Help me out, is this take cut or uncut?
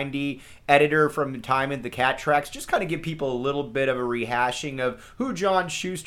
uncut